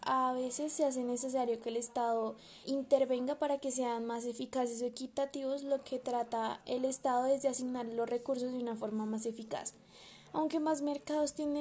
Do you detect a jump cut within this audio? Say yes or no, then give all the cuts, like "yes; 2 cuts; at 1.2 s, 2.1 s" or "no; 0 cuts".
yes; 2 cuts; at 2.6 s, 6.6 s